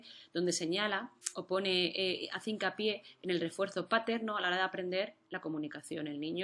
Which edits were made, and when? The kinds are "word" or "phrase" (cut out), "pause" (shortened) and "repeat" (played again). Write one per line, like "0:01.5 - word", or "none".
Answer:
none